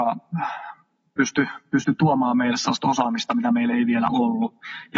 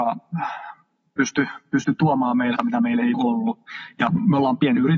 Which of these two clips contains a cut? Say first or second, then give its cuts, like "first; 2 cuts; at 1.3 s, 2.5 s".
second; 2 cuts; at 2.6 s, 3.1 s